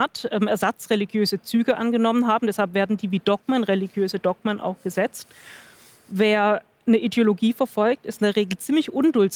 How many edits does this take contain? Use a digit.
0